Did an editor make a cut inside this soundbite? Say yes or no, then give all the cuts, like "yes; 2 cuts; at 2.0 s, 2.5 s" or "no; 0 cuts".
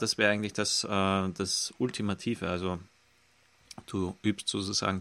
no; 0 cuts